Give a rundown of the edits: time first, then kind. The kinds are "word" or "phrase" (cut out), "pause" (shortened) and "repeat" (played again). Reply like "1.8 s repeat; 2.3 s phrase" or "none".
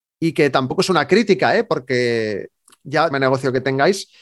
3.1 s phrase